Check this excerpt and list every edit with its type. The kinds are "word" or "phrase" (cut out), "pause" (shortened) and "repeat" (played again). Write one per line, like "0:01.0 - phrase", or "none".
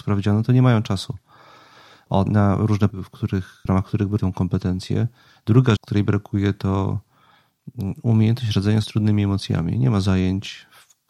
0:02.3 - word
0:02.9 - word
0:03.7 - word
0:04.2 - word
0:05.8 - word
0:08.8 - word